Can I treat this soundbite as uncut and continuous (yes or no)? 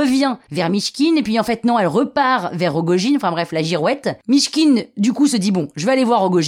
no